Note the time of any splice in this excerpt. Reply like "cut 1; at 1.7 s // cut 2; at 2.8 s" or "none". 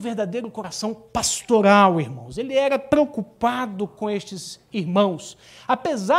none